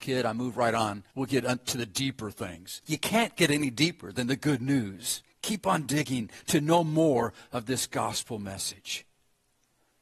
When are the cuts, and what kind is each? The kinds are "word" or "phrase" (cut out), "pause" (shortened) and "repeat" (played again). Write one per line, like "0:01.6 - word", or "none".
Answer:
0:01.1 - pause
0:02.8 - pause
0:05.3 - pause